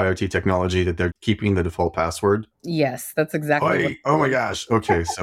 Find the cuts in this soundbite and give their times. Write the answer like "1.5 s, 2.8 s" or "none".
1.1 s, 2.5 s